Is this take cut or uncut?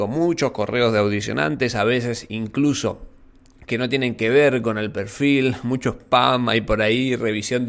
uncut